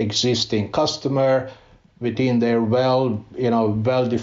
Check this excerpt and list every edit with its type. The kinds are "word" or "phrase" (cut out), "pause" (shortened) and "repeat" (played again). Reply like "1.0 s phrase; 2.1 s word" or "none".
none